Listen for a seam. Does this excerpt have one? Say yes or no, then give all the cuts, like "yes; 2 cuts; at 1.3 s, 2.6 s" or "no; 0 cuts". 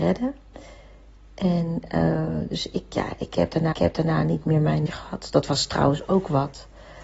yes; 2 cuts; at 3.7 s, 4.9 s